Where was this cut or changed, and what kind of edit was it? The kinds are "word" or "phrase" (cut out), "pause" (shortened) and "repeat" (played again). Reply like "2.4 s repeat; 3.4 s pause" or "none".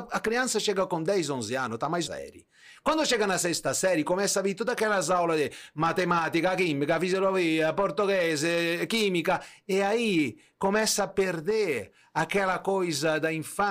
2.1 s phrase